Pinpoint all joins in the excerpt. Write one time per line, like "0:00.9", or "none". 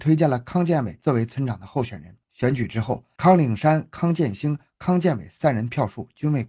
0:02.2

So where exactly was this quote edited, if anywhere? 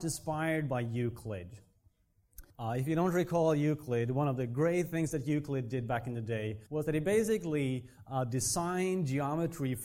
0:02.5
0:06.7

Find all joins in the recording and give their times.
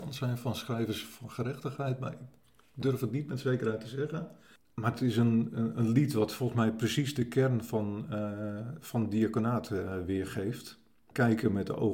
none

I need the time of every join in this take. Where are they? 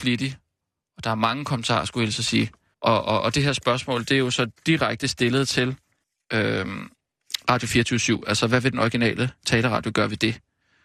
0:02.7
0:06.0

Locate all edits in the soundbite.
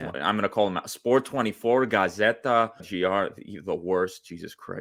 0:02.8

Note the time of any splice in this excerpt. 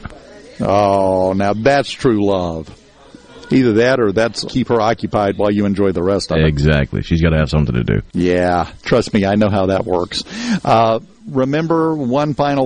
0:04.5
0:08.1

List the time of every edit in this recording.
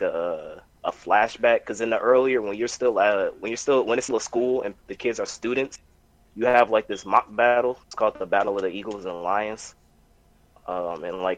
0:04.1
0:04.8
0:05.3
0:07.8

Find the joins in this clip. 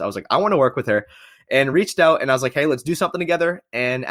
none

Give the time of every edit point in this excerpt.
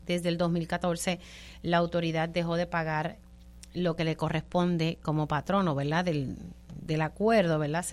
none

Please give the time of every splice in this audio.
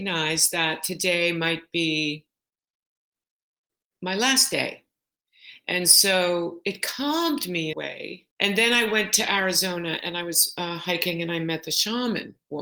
0:07.7
0:08.3

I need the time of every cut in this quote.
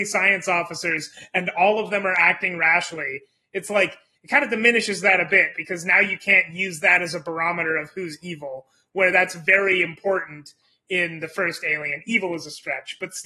none

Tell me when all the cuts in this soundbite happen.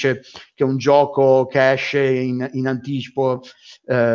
none

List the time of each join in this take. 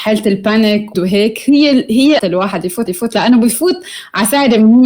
0:00.9
0:02.2
0:02.9

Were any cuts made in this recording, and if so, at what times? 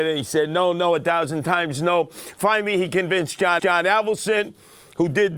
0:03.6

